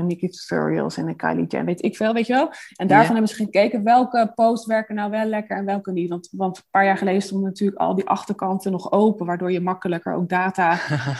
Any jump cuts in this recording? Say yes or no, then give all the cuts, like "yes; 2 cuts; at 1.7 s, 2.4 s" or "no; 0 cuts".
no; 0 cuts